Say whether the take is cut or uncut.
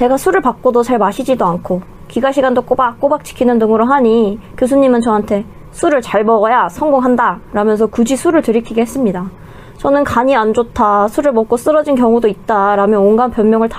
uncut